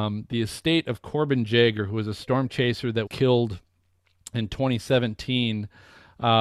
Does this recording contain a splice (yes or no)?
yes